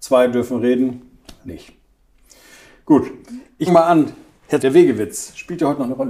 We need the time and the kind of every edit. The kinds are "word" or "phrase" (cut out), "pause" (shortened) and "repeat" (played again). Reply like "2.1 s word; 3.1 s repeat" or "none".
1.4 s word; 3.7 s word; 4.6 s word